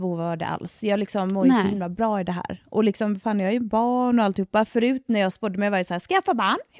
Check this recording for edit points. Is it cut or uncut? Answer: uncut